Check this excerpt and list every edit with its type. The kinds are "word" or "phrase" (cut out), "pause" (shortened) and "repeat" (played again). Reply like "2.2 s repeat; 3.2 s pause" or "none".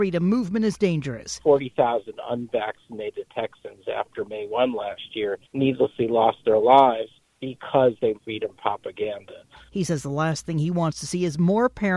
5.4 s pause; 7.2 s pause; 8.2 s phrase